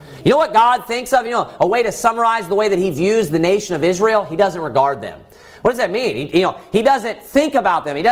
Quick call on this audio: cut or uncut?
uncut